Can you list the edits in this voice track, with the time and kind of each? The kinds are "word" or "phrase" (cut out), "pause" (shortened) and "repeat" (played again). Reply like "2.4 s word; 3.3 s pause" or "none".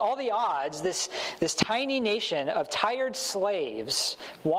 none